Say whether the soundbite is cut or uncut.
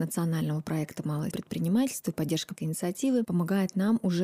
cut